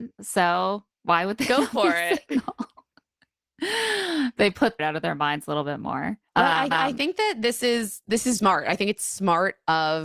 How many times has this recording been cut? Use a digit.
5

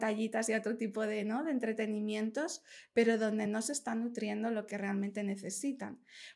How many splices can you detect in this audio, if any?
0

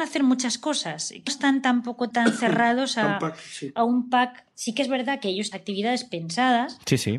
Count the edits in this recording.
3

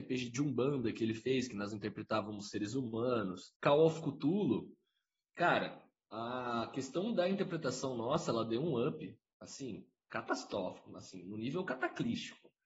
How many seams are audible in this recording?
1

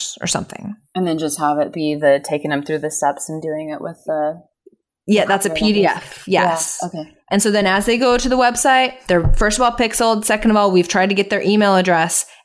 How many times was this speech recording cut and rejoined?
0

